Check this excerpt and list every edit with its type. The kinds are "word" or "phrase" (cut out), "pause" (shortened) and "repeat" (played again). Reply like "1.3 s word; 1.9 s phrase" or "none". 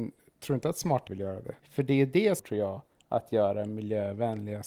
1.1 s word; 1.6 s pause; 2.4 s phrase; 2.9 s pause